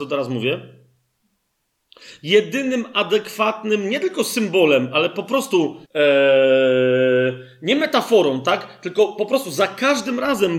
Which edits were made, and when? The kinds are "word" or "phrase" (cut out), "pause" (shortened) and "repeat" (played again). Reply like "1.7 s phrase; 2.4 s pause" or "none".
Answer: 5.8 s pause